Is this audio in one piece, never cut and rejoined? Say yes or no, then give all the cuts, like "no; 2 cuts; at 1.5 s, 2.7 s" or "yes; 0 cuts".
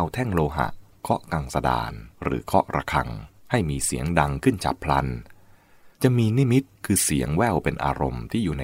no; 3 cuts; at 2.1 s, 3.4 s, 5.9 s